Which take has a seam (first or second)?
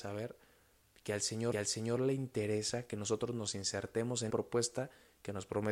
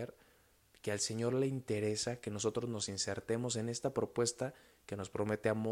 first